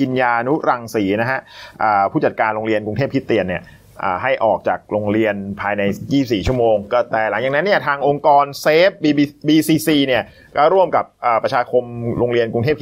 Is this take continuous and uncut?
yes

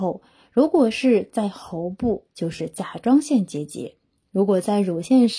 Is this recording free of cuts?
yes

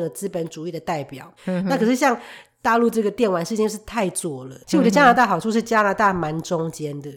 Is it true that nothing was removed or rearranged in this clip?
no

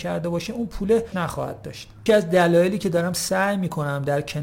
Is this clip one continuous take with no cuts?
no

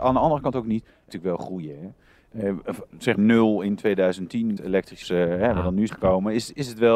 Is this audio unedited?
no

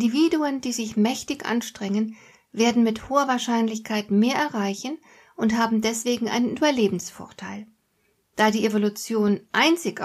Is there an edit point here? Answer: no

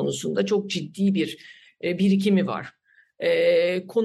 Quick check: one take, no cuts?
yes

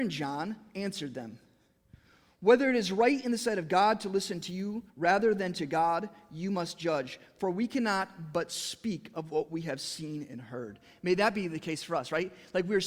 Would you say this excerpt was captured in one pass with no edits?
no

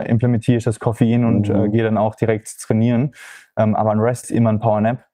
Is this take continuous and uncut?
no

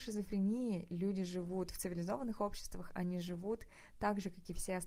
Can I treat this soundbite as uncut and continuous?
yes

